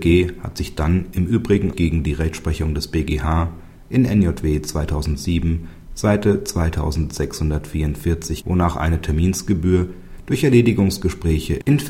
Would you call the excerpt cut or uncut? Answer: cut